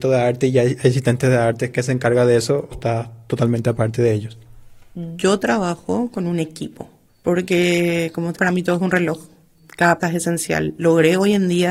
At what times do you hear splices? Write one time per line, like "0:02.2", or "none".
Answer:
0:01.7
0:02.7
0:08.4
0:10.0